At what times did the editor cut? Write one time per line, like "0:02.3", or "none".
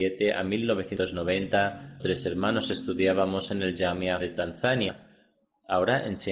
0:02.0
0:04.2